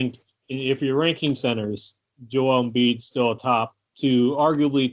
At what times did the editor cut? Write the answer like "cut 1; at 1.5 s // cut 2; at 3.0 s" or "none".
cut 1; at 3.9 s